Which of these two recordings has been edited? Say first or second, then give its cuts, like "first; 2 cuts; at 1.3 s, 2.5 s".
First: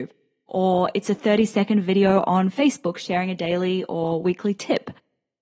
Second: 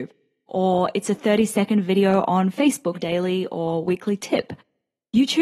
second; 1 cut; at 2.9 s